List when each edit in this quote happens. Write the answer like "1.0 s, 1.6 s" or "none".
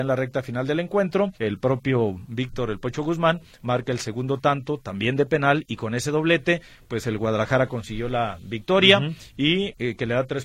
1.3 s